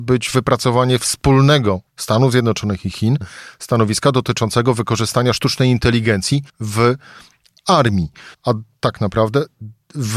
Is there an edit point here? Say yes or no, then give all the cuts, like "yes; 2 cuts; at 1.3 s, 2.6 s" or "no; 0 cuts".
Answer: yes; 3 cuts; at 1.9 s, 6.5 s, 8.3 s